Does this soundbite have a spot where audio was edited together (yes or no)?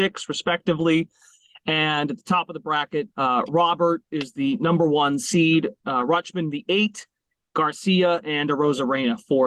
yes